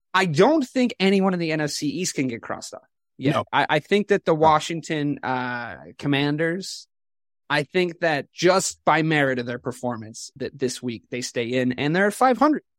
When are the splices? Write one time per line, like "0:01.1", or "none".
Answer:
none